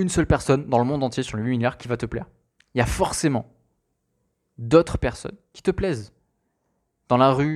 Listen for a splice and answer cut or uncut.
uncut